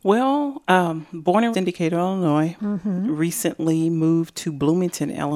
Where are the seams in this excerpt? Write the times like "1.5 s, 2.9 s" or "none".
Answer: 1.5 s